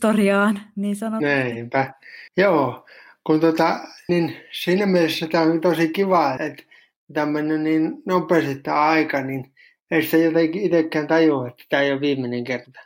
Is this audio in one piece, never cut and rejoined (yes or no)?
no